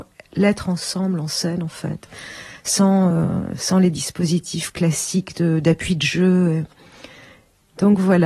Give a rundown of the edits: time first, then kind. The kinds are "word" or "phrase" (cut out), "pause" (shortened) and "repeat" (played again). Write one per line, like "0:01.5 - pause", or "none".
none